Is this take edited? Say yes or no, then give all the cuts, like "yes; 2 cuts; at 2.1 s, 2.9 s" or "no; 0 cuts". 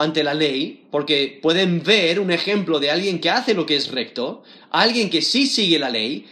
no; 0 cuts